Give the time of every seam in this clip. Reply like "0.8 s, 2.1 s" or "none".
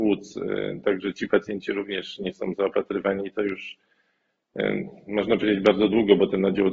none